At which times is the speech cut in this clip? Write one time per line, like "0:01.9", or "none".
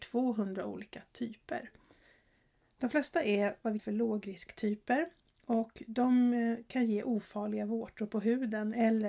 0:03.8